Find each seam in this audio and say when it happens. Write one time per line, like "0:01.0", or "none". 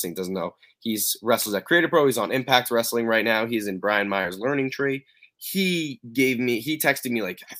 none